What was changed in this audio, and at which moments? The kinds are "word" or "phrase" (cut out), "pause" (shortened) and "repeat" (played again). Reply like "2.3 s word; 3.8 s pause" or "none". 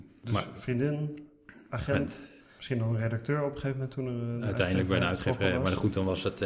none